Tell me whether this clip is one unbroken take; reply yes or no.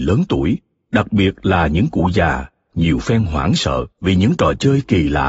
no